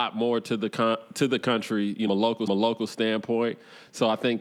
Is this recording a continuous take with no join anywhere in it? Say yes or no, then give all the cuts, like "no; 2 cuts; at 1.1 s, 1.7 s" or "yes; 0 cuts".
no; 2 cuts; at 2.1 s, 2.5 s